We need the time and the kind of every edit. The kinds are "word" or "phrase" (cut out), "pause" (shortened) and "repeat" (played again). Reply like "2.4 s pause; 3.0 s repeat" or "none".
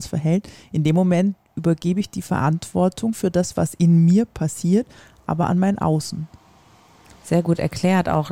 none